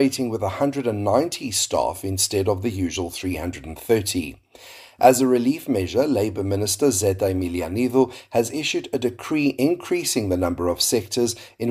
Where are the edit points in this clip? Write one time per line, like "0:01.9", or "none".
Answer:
none

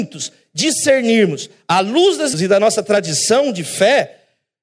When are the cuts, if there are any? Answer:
0:02.3

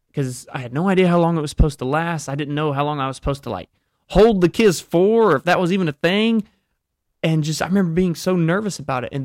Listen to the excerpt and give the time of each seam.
none

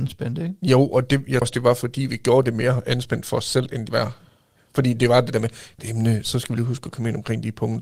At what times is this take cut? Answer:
0:01.4
0:03.9
0:05.8

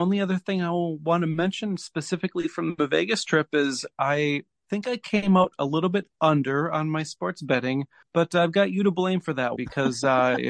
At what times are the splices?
0:08.0
0:09.6

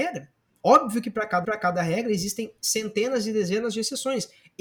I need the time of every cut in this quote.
0:01.4

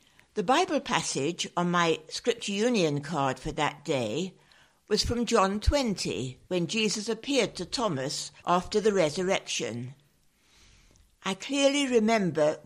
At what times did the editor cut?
0:06.4
0:08.4

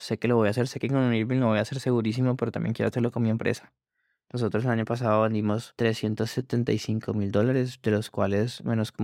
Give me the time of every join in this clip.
none

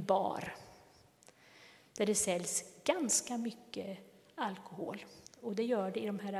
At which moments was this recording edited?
0:05.3

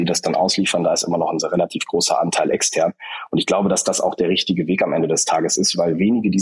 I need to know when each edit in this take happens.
none

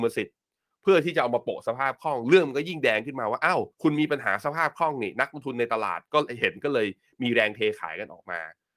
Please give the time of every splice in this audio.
0:03.7

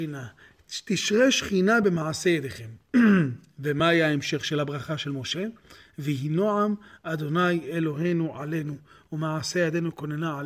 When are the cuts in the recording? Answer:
none

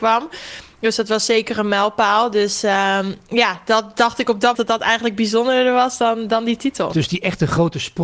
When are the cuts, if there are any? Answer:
0:04.5

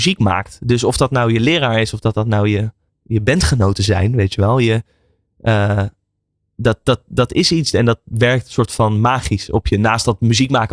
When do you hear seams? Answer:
none

